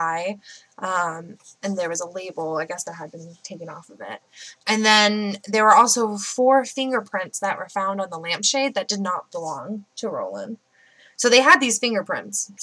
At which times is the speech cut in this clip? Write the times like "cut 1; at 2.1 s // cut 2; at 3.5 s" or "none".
cut 1; at 4.6 s